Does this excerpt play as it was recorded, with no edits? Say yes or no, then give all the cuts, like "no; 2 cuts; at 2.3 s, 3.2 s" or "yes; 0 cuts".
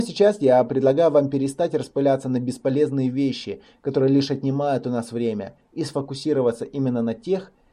yes; 0 cuts